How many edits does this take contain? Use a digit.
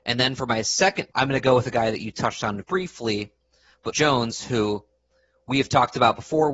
3